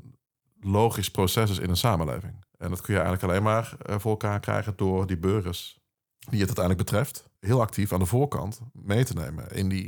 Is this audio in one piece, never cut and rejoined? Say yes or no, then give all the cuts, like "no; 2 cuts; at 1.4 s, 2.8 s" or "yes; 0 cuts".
no; 3 cuts; at 2.5 s, 5.9 s, 7.4 s